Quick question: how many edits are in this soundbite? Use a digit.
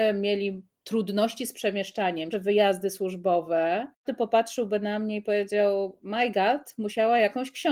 2